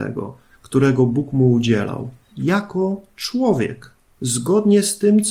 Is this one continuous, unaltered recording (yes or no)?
no